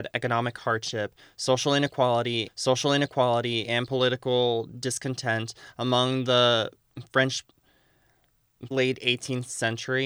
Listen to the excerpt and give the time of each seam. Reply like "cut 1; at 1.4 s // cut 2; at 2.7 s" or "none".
cut 1; at 2.5 s // cut 2; at 8.7 s